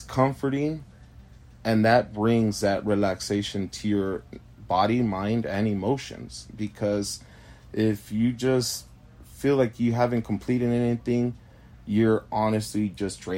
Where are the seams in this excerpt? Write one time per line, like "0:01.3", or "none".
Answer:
none